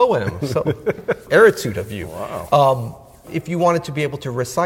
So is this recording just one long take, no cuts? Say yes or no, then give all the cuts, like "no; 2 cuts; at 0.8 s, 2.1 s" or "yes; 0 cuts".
no; 2 cuts; at 1.3 s, 3.3 s